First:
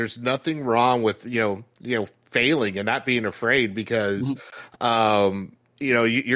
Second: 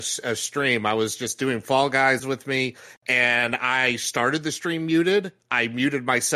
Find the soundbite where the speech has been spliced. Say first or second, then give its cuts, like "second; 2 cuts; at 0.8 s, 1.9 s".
second; 1 cut; at 2.2 s